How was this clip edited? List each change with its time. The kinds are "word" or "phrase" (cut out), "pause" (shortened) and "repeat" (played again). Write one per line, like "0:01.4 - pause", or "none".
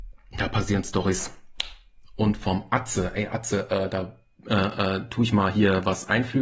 none